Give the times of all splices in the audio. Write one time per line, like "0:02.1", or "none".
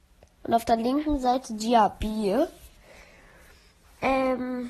none